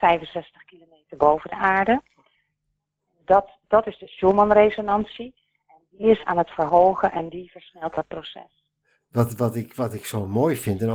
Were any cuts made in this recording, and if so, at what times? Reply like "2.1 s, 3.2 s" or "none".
none